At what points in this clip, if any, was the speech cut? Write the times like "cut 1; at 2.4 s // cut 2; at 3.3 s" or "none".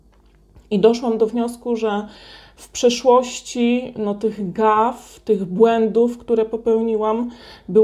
none